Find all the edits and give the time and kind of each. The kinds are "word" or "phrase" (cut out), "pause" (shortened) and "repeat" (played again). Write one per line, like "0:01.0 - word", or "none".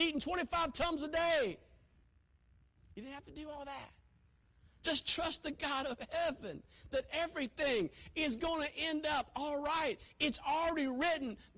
none